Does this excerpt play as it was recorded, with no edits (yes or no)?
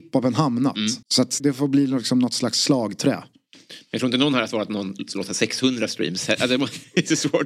no